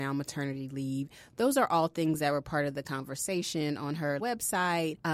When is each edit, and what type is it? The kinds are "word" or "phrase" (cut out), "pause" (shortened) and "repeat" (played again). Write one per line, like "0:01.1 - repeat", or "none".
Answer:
0:04.2 - word